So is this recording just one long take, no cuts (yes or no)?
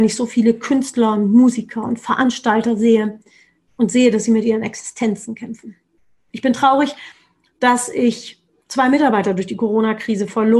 yes